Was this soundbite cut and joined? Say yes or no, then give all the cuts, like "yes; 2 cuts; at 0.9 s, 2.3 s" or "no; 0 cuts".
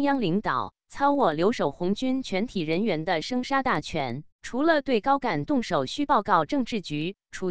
yes; 1 cut; at 4.3 s